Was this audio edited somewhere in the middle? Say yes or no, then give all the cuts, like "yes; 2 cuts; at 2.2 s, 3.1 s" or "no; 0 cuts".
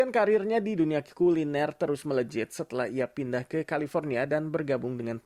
no; 0 cuts